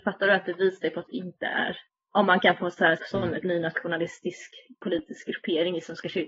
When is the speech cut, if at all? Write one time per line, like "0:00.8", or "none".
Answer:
0:01.1
0:03.0
0:03.4